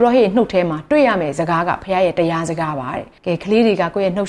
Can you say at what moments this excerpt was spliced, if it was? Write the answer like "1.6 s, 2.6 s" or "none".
3.2 s